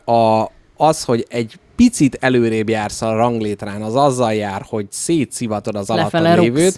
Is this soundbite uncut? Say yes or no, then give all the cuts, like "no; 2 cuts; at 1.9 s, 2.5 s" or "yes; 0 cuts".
yes; 0 cuts